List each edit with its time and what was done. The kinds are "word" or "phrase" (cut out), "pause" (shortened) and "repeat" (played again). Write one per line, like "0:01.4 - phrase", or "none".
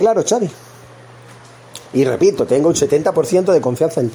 none

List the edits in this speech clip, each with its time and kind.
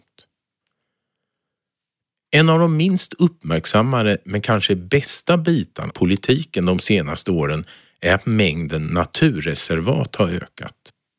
0:05.9 - word

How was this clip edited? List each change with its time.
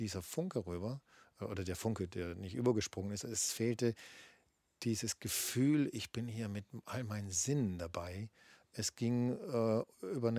none

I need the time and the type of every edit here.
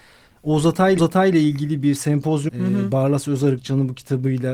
0:01.0 - repeat
0:02.5 - word

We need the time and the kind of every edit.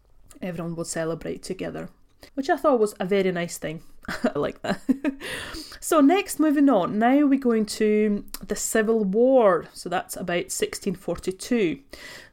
0:02.3 - pause
0:04.4 - word

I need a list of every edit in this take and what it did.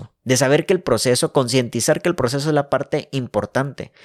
none

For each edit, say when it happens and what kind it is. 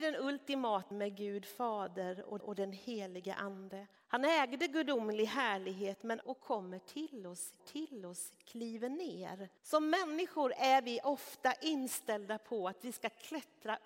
0:00.9 - word
0:02.4 - repeat
0:04.0 - pause
0:06.2 - word
0:07.6 - repeat
0:09.6 - pause

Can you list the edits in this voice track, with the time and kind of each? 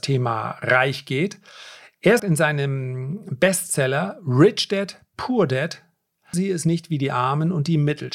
0:02.2 - word
0:06.3 - word

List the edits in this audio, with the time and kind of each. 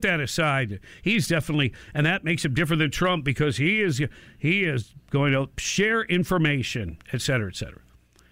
none

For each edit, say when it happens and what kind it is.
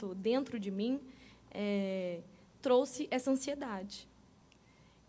none

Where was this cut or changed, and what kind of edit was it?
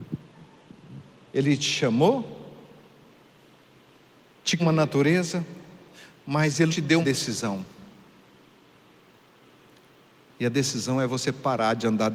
0:04.6 - phrase
0:06.7 - word
0:07.0 - word

